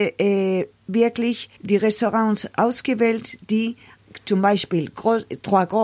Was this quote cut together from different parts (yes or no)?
yes